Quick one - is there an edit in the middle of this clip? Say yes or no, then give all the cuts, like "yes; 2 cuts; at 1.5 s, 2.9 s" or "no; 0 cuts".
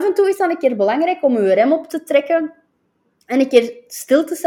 no; 0 cuts